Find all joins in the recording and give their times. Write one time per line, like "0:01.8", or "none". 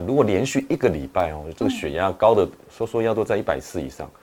none